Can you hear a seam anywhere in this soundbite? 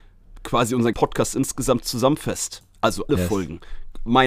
yes; 2 cuts; at 0.9 s, 3.1 s

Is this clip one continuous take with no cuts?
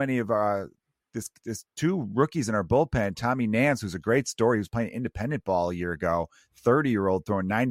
yes; 0 cuts

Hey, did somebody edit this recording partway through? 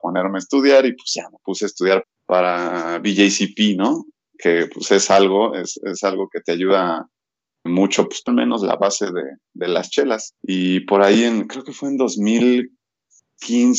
yes; 4 cuts; at 2.0 s, 7.7 s, 8.3 s, 10.4 s

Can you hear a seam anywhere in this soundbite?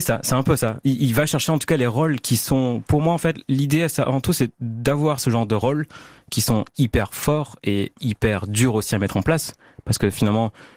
no; 0 cuts

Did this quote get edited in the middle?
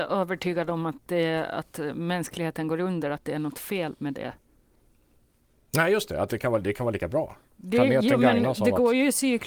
no; 0 cuts

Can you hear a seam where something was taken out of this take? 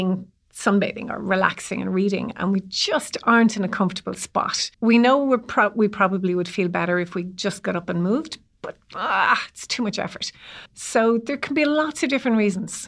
yes; 2 cuts; at 4.7 s, 10.7 s

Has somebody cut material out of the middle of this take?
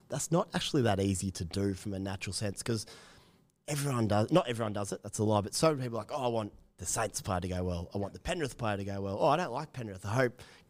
no; 0 cuts

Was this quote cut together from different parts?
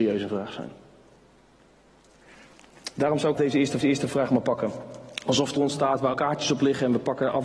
yes; 4 cuts; at 3.4 s, 3.8 s, 5.6 s, 6.1 s

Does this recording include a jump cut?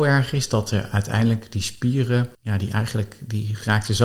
yes; 1 cut; at 2.3 s

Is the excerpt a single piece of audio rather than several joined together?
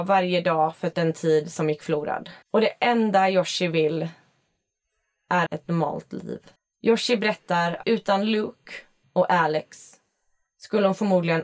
no; 6 cuts; at 0.9 s, 2.4 s, 5.5 s, 6.6 s, 7.8 s, 9.0 s

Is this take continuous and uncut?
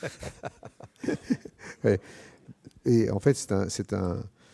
no; 1 cut; at 2.8 s

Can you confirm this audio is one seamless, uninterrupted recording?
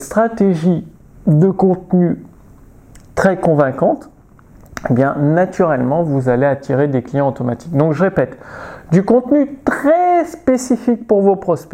yes; 0 cuts

